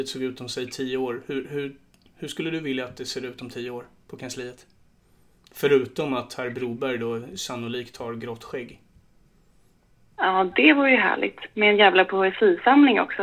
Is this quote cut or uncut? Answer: uncut